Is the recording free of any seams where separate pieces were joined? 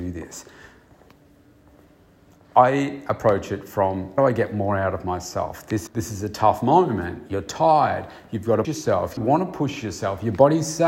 no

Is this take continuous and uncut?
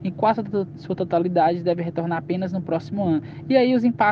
yes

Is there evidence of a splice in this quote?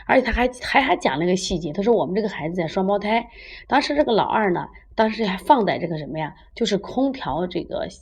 yes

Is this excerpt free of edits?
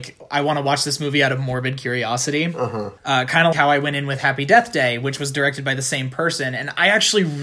no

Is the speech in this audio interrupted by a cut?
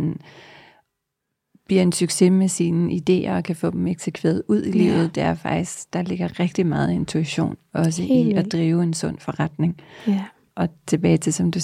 no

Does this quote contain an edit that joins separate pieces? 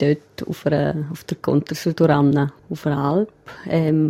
no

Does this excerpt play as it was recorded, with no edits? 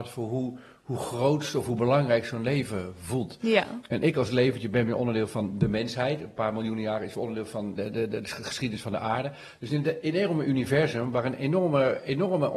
no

